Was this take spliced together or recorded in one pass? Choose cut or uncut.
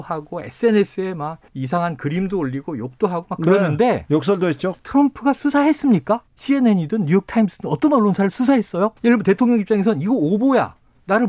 cut